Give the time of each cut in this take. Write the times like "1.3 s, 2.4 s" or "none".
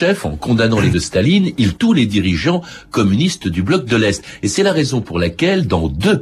0.9 s, 1.8 s